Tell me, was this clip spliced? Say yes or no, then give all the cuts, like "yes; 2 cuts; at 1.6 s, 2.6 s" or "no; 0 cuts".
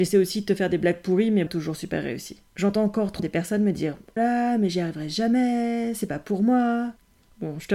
yes; 4 cuts; at 1.5 s, 2.5 s, 3.2 s, 4.2 s